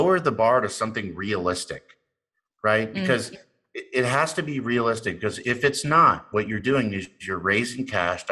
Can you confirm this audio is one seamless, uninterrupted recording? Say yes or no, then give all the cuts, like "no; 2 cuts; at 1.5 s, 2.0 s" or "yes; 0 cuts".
yes; 0 cuts